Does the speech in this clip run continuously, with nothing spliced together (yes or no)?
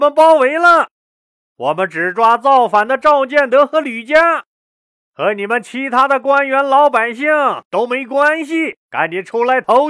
no